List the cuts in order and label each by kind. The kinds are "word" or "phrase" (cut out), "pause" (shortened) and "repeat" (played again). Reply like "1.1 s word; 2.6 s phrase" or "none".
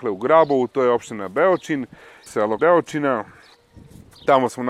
2.3 s word; 2.6 s word